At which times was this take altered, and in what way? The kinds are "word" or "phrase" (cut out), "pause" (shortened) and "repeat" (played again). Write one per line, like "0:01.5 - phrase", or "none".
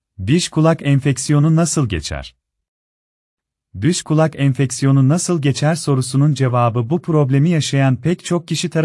none